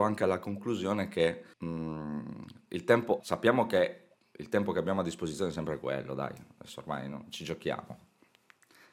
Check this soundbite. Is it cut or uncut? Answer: cut